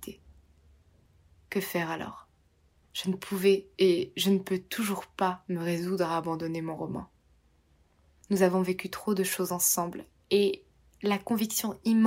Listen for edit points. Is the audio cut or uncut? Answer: uncut